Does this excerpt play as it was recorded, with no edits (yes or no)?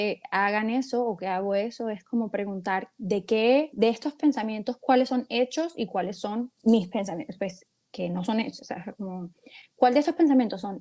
yes